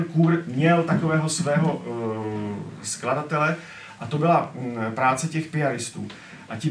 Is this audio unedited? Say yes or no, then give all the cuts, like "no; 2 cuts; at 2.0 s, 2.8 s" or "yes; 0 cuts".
yes; 0 cuts